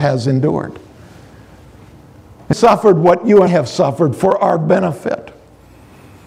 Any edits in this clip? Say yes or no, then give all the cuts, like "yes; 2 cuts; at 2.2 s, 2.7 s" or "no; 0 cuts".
yes; 2 cuts; at 2.5 s, 3.5 s